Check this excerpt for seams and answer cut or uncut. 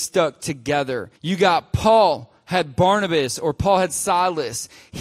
cut